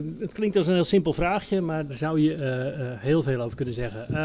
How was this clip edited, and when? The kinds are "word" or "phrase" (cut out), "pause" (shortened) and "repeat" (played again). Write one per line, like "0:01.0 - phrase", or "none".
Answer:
0:01.9 - word